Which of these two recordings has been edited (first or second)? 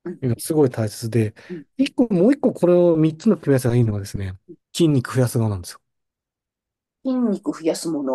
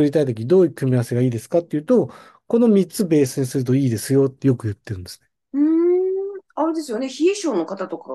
first